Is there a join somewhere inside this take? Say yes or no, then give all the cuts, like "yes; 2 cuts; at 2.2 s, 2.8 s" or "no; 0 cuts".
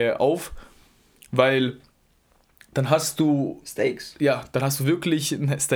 no; 0 cuts